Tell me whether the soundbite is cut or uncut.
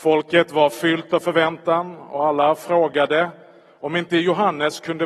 uncut